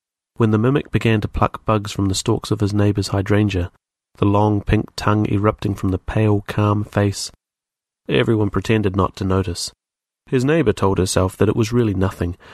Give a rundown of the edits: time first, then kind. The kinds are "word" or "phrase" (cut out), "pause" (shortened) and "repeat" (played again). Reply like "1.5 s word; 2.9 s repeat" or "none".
none